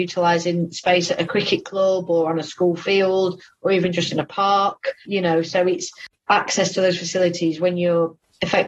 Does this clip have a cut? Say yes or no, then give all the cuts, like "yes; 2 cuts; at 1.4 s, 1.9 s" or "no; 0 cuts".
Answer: no; 0 cuts